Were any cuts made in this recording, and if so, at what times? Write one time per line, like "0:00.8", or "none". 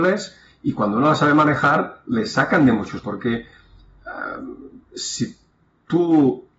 0:03.0